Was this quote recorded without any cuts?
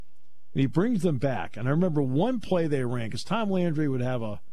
yes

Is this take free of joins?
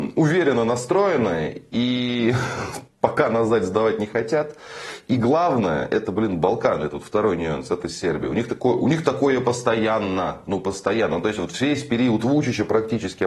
yes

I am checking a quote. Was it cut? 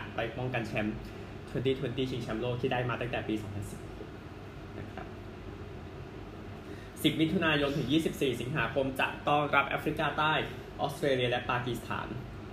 no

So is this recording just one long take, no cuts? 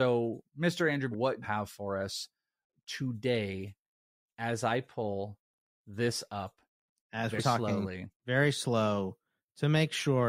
no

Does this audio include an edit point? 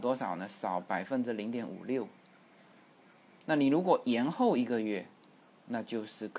no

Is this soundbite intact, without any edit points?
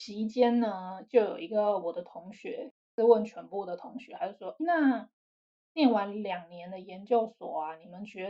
no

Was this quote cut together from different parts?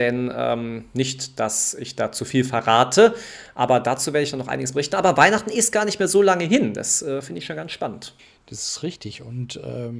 no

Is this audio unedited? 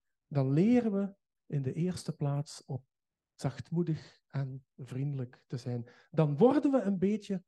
yes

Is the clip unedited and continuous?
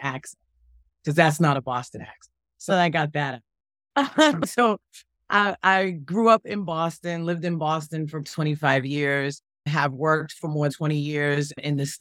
no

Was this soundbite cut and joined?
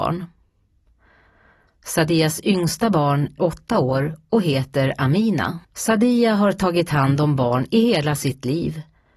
yes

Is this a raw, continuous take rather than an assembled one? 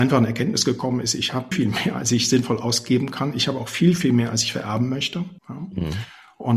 no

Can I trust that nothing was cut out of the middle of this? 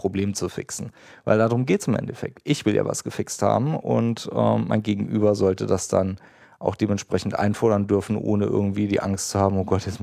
yes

